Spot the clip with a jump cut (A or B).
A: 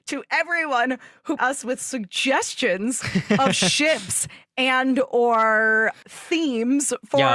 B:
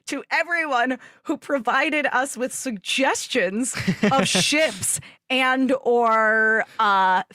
A